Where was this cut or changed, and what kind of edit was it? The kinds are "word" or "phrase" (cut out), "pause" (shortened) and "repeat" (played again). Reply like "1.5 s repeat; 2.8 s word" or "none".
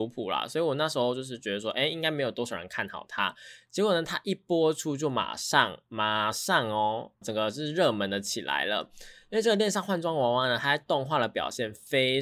7.2 s phrase